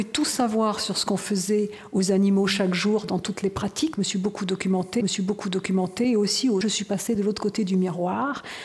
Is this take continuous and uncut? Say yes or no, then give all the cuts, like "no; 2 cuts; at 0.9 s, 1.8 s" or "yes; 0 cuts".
no; 3 cuts; at 3.9 s, 5.0 s, 6.6 s